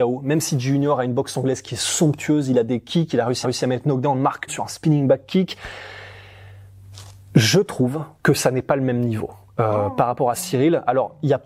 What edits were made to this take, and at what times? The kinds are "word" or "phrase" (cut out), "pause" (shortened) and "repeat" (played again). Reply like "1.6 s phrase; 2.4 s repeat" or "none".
3.4 s repeat; 4.5 s word

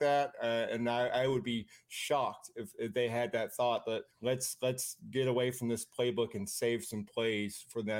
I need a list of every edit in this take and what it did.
4.1 s pause

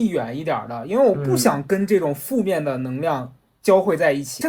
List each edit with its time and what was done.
none

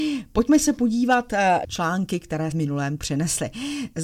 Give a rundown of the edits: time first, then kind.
1.6 s word; 2.5 s word; 3.0 s word

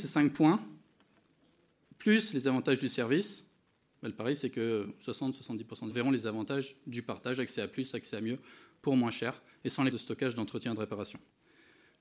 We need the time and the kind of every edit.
5.9 s word; 9.9 s word

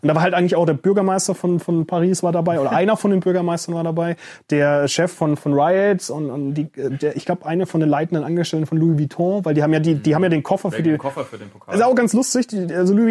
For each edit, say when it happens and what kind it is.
none

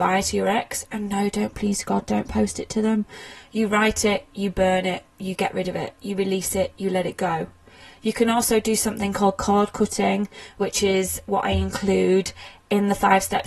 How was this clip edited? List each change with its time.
none

